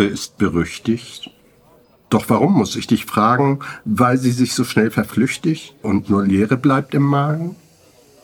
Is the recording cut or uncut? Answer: uncut